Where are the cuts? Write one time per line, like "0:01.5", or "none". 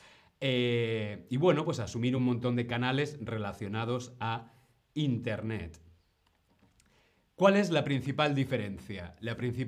none

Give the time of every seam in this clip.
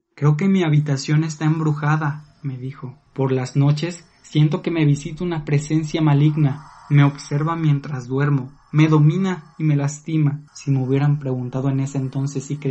0:03.1
0:10.5

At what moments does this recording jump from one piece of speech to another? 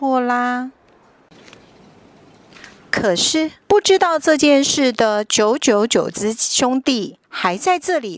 0:03.6
0:07.2

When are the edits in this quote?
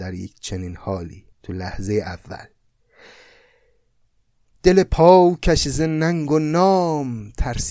0:01.3

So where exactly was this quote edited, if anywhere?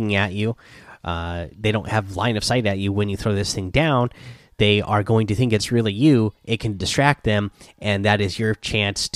none

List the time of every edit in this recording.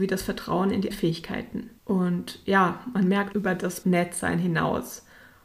0:00.9
0:01.8
0:03.3
0:03.8

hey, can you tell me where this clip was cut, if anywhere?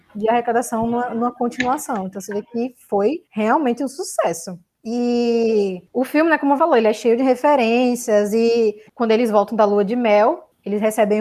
0:03.3
0:06.6
0:08.9

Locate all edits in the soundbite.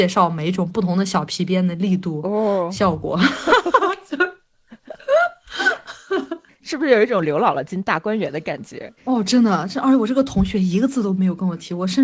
0:09.0

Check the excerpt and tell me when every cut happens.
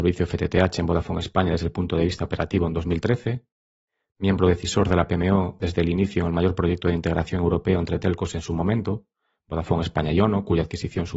none

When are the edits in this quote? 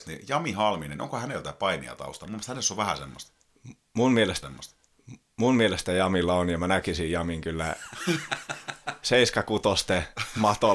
0:04.4

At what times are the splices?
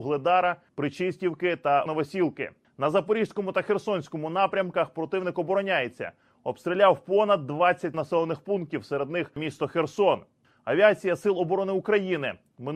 0:01.9
0:07.9

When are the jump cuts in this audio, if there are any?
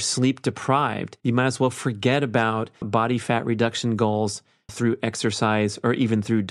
0:01.2
0:02.8
0:04.7

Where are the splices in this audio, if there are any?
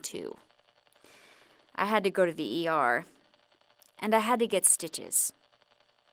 none

